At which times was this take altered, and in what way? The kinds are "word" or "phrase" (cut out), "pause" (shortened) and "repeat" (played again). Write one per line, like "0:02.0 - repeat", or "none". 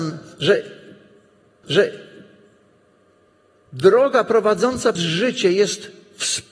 0:01.6 - repeat
0:05.0 - word